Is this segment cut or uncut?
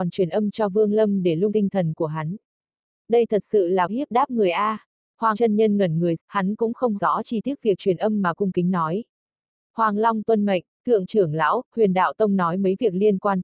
cut